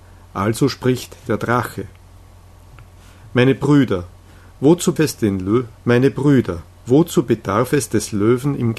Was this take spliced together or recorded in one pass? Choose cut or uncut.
cut